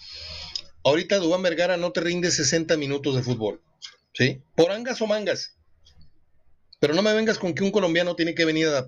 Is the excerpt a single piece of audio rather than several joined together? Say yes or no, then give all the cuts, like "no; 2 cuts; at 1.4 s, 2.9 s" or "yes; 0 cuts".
yes; 0 cuts